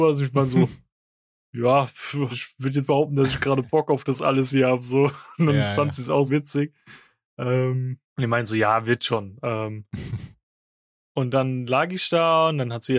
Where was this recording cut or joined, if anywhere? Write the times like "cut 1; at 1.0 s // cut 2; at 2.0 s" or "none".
cut 1; at 2.3 s // cut 2; at 2.9 s // cut 3; at 6.3 s // cut 4; at 8.1 s